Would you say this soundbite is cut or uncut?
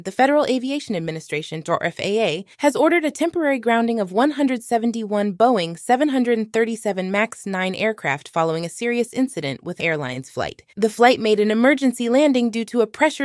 cut